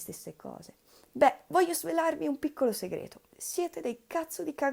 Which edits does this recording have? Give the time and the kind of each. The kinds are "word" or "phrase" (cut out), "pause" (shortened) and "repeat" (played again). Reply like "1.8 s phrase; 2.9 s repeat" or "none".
3.3 s pause

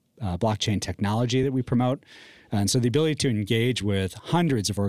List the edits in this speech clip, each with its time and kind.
none

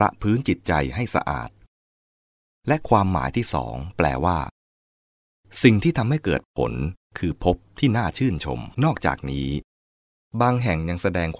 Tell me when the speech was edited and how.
8.7 s pause

